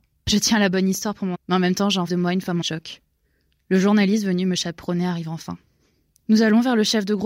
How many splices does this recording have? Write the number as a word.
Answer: three